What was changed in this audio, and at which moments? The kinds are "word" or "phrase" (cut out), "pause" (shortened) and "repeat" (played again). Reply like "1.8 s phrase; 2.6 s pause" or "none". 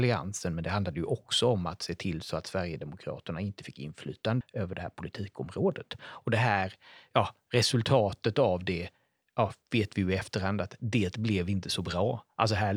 4.4 s word